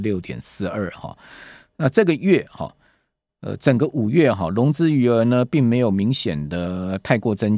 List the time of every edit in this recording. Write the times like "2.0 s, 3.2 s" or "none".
none